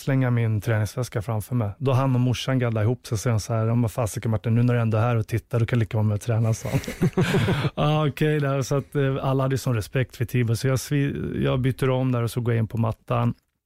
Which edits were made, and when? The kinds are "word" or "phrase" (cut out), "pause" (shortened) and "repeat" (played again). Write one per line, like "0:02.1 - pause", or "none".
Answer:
none